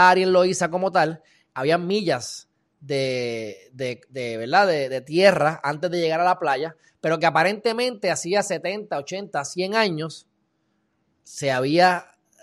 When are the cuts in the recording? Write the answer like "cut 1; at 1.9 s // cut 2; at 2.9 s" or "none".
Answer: none